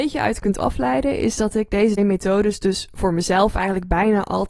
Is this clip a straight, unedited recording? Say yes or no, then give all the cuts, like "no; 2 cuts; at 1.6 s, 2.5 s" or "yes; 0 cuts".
no; 1 cut; at 2.0 s